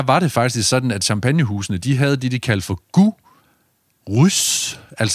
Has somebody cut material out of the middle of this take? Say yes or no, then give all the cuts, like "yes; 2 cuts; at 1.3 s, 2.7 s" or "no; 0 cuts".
no; 0 cuts